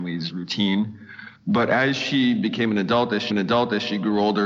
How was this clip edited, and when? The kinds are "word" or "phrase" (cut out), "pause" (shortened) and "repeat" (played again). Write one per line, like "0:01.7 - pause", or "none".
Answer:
0:01.4 - pause
0:03.3 - repeat